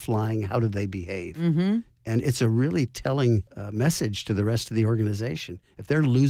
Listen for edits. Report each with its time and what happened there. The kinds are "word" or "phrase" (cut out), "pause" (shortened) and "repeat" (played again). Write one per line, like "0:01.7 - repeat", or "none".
0:03.5 - pause